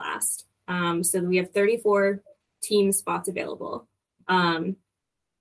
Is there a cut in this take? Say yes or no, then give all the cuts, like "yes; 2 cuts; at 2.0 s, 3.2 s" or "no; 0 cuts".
no; 0 cuts